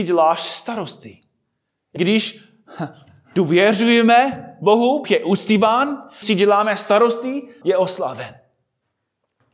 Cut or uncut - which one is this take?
cut